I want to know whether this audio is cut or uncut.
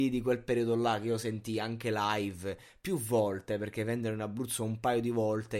uncut